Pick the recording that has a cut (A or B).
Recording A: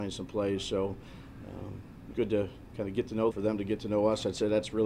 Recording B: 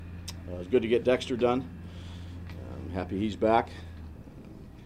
A